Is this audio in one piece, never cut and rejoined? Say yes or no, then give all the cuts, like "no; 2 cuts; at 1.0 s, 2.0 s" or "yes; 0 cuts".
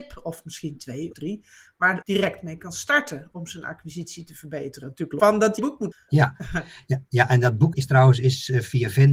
no; 6 cuts; at 1.1 s, 2.0 s, 5.2 s, 5.6 s, 5.9 s, 7.7 s